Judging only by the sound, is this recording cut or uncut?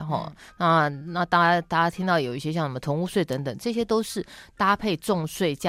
uncut